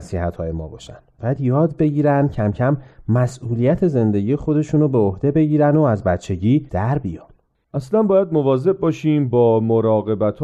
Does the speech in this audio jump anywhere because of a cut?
no; 0 cuts

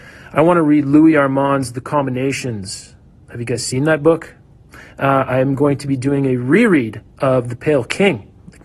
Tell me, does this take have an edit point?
yes; 1 cut; at 3.2 s

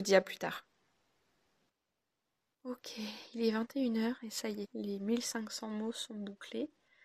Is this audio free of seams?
no; 1 cut; at 4.6 s

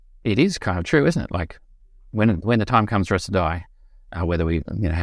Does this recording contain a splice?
no; 0 cuts

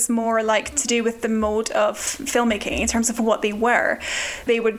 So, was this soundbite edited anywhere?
no; 0 cuts

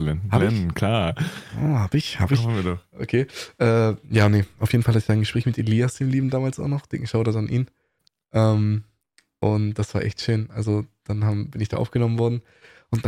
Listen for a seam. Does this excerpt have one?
no; 0 cuts

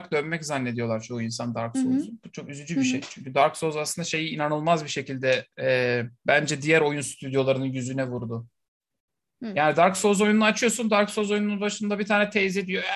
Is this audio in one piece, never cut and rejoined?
no; 1 cut; at 6.2 s

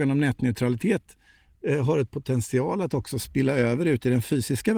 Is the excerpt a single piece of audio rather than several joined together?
yes; 0 cuts

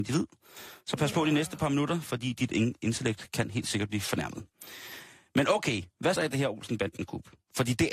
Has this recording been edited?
yes; 1 cut; at 6.2 s

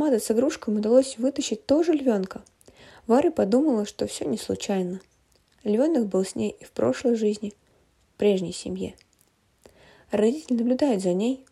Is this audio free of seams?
yes; 0 cuts

